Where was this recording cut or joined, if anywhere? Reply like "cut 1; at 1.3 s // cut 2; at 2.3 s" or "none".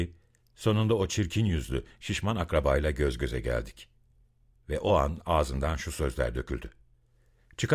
none